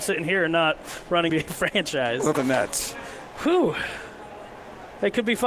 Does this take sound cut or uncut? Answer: cut